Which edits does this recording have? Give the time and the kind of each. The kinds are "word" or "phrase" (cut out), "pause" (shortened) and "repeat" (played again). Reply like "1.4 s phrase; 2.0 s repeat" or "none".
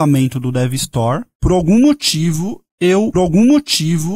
3.1 s repeat